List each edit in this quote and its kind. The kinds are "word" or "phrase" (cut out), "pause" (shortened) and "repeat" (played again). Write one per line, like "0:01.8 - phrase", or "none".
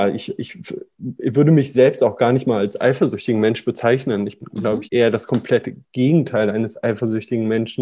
0:04.4 - word
0:04.8 - word